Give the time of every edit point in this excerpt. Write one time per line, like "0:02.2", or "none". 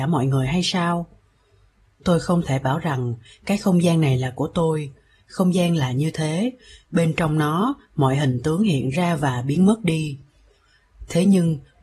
none